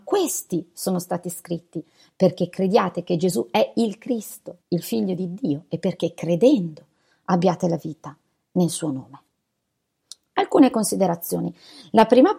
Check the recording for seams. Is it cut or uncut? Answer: cut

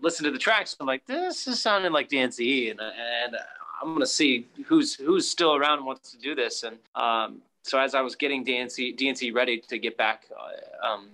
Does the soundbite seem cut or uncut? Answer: cut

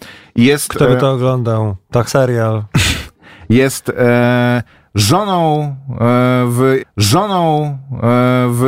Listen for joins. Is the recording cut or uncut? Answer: cut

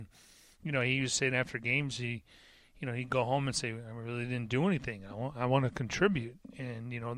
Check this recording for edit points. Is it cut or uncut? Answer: uncut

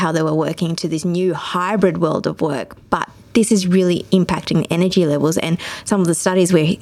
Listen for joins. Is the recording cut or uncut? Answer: uncut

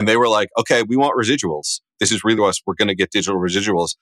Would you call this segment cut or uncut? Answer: cut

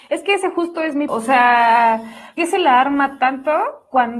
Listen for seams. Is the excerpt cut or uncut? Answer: cut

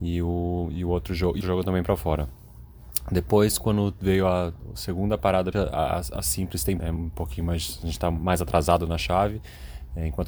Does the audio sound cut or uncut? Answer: cut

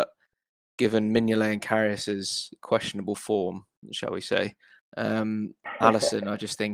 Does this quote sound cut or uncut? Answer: uncut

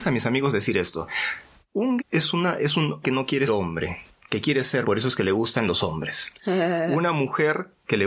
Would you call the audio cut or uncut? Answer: cut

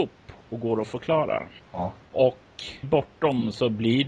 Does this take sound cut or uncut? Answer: cut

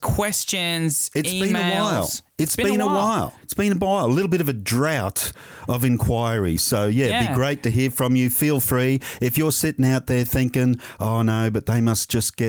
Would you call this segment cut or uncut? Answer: cut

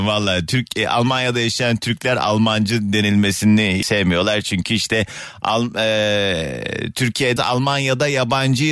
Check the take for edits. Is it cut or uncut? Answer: cut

